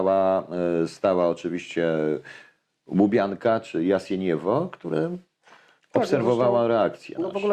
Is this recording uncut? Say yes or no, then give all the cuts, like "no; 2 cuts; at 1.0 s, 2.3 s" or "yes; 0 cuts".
yes; 0 cuts